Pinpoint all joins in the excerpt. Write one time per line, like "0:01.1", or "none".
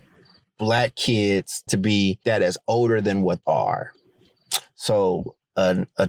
0:01.7
0:02.2
0:03.4